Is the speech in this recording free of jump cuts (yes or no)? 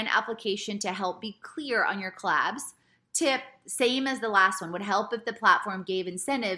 yes